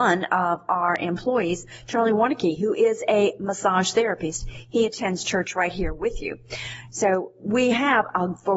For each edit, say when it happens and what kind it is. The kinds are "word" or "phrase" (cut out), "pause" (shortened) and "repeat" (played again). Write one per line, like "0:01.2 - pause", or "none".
none